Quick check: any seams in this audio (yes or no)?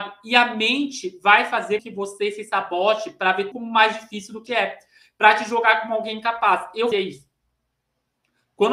yes